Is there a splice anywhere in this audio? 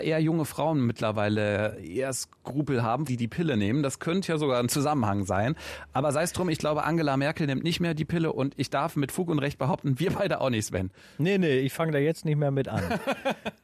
yes; 1 cut; at 3.1 s

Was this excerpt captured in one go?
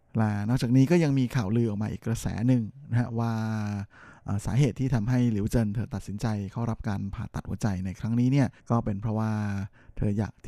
no; 1 cut; at 8.6 s

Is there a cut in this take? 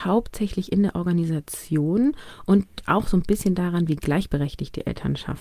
no; 0 cuts

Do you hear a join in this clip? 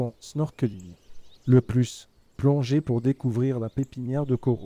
no; 0 cuts

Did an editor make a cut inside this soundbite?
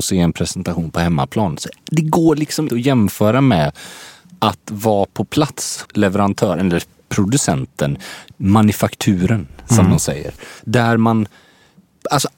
yes; 3 cuts; at 2.7 s, 5.8 s, 10.6 s

